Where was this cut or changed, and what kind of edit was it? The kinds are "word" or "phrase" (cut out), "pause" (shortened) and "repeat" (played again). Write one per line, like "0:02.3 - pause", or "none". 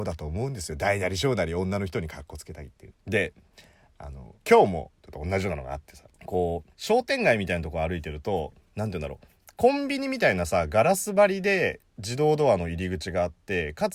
0:02.9 - word
0:04.4 - pause
0:05.0 - pause
0:06.1 - pause
0:06.7 - pause